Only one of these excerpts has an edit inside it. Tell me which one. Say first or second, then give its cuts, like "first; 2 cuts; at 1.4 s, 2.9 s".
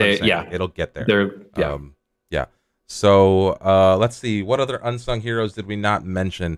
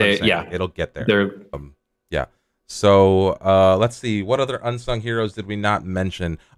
second; 1 cut; at 1.5 s